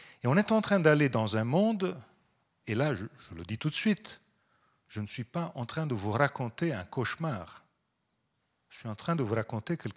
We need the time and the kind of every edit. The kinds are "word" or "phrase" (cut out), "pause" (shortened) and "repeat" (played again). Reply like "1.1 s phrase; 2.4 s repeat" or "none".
none